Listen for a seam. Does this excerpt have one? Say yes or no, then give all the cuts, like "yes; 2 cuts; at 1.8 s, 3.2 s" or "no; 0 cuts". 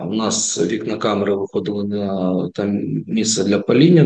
no; 0 cuts